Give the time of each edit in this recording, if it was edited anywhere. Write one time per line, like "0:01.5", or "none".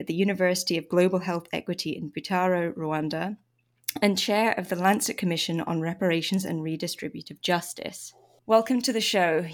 none

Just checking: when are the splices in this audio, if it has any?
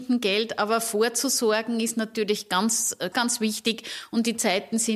0:03.1

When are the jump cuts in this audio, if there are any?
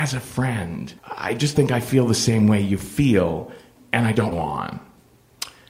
0:01.0
0:01.5
0:04.3

